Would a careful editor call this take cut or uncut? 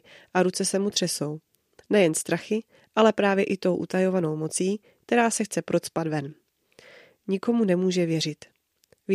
uncut